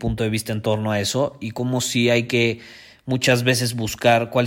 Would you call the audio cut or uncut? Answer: uncut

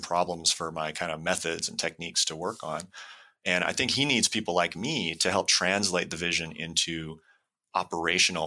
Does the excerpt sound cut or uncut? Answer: uncut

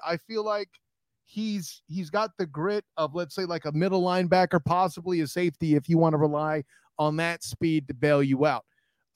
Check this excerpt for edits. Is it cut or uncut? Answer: uncut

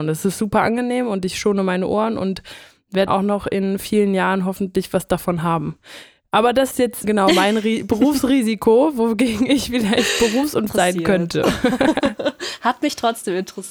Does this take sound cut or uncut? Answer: cut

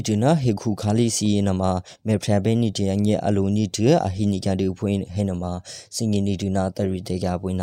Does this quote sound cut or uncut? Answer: uncut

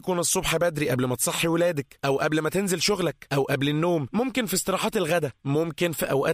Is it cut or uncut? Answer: uncut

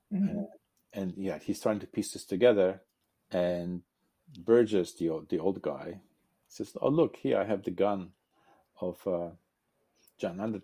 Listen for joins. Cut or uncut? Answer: uncut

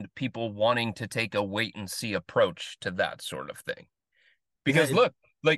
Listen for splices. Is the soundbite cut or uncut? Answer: uncut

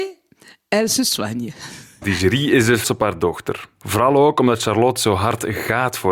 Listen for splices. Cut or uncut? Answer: cut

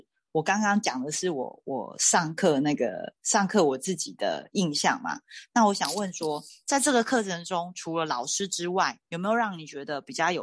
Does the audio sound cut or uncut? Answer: cut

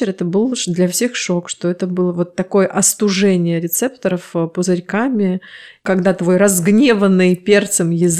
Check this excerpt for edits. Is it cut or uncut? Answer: uncut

